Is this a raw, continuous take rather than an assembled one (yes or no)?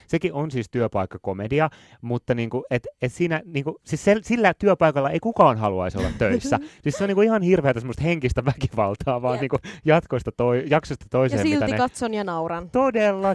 yes